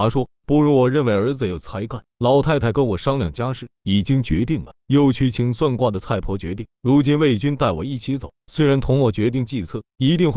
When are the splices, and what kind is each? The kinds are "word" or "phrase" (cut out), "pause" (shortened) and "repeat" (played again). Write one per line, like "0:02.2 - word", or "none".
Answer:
none